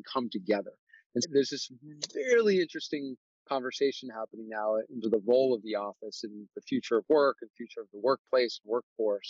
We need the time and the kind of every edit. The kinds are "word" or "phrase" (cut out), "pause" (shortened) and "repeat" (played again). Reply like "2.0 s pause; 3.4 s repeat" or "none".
1.2 s word; 5.0 s word